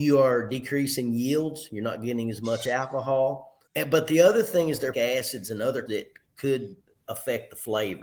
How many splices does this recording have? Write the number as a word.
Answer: three